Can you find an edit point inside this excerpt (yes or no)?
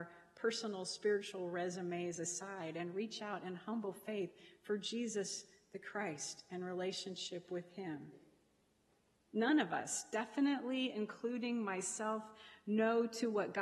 no